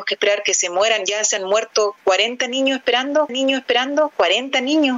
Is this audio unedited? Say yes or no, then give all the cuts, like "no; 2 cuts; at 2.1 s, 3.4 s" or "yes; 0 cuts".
no; 1 cut; at 3.3 s